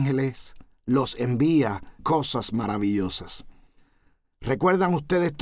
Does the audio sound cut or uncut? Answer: cut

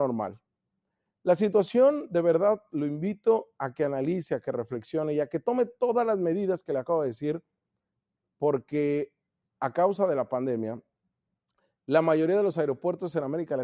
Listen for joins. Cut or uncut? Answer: uncut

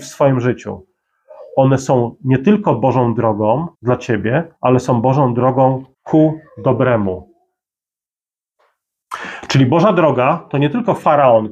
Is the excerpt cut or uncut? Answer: cut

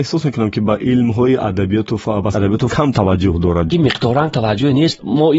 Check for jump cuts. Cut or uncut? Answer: cut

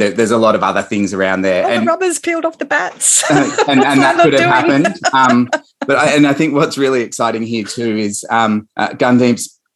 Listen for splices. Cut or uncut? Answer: cut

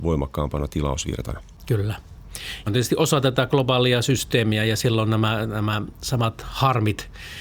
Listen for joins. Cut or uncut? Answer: cut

